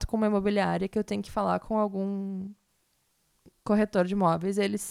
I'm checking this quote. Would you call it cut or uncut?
uncut